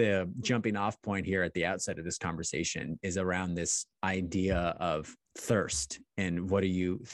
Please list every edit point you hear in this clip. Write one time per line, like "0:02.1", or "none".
0:05.2